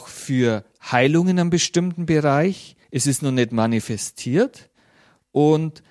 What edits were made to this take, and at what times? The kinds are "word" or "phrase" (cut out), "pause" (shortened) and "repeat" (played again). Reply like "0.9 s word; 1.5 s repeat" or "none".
2.8 s pause